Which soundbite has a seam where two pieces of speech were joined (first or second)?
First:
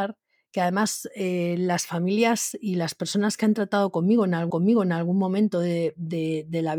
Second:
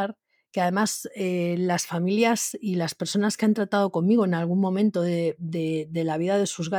first